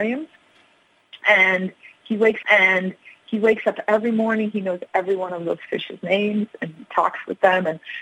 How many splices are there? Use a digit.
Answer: 1